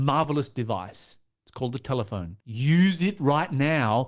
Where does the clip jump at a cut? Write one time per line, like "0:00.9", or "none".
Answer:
0:02.4